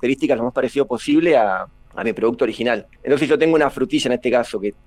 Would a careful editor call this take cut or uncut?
uncut